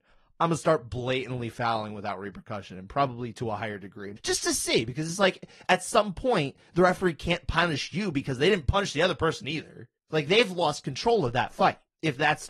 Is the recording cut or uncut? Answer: cut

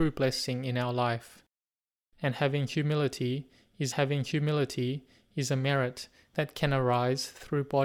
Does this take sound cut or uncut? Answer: cut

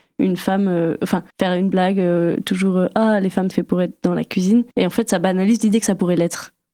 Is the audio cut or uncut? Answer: cut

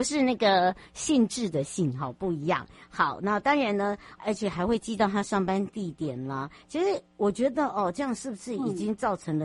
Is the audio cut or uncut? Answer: cut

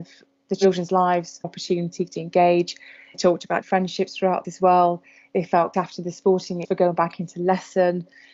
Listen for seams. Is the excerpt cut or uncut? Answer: cut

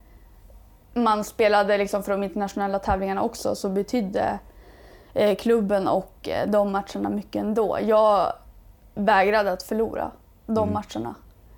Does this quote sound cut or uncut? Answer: uncut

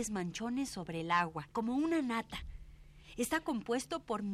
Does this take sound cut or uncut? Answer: cut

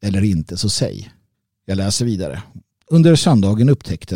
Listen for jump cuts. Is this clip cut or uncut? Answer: cut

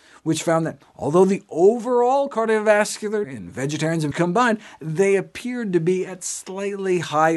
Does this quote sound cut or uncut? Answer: cut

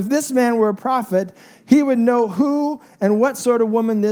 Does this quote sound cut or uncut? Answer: uncut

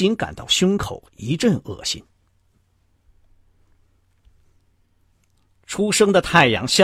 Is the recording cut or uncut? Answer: uncut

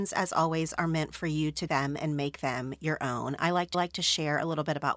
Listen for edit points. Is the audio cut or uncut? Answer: cut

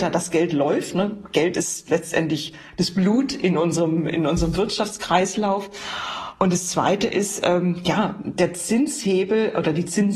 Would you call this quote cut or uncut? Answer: uncut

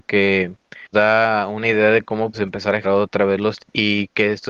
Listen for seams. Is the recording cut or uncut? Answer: cut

